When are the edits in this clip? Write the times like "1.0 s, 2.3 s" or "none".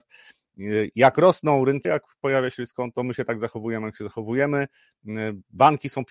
1.8 s

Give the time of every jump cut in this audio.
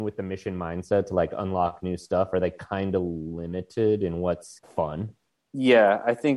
4.6 s

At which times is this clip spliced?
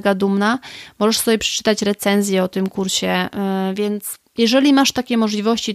none

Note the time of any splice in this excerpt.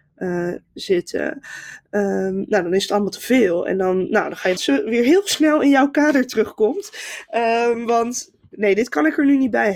4.6 s

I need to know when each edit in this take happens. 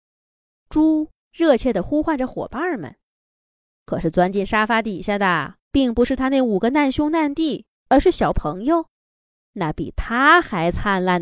1.2 s, 3.2 s, 5.6 s, 7.7 s

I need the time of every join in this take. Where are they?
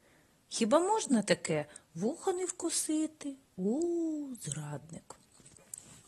3.5 s

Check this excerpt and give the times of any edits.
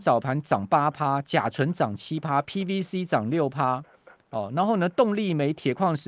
none

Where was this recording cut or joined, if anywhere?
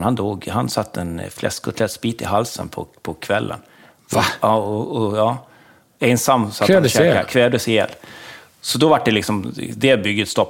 none

